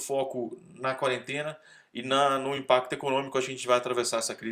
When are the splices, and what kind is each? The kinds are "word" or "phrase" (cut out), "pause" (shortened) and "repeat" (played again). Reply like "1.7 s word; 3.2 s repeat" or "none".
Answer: none